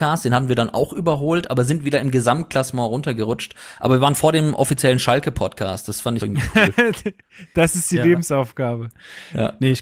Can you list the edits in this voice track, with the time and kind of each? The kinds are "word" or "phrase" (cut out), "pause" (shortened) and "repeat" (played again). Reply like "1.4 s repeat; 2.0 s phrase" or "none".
6.2 s phrase

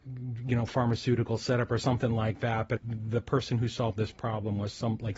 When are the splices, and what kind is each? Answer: 2.8 s phrase

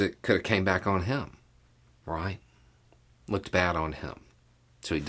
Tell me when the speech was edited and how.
2.8 s pause

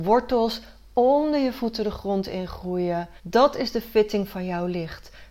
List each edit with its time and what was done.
3.2 s pause

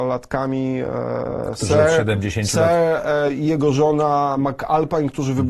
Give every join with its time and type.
none

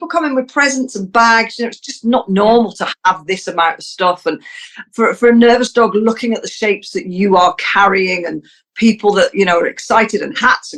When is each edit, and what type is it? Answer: none

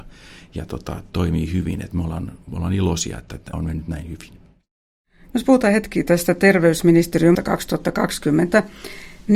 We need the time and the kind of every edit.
1.1 s word; 2.4 s pause; 3.5 s phrase; 7.3 s word

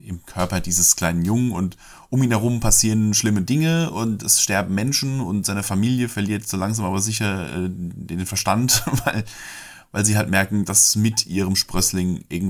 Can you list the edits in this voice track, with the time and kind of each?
none

